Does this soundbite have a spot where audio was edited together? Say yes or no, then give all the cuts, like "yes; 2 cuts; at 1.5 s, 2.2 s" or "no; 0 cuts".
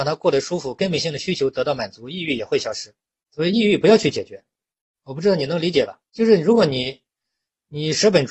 yes; 1 cut; at 6.1 s